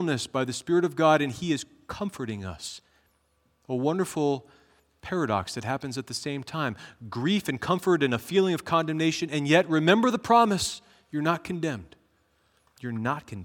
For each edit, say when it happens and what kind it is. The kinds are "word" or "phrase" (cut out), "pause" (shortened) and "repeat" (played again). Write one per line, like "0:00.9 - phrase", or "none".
none